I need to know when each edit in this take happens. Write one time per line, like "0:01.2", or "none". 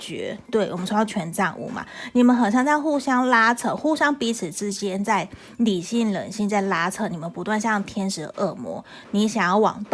0:09.0